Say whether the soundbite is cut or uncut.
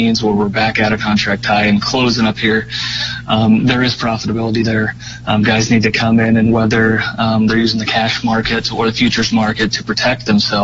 uncut